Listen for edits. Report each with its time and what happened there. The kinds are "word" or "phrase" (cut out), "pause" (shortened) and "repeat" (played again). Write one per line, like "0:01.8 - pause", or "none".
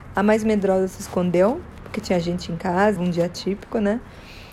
0:03.0 - phrase